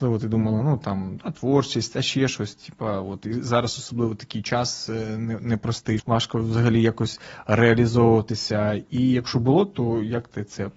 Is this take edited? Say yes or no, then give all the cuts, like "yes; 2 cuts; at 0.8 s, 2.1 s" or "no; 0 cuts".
yes; 1 cut; at 6.0 s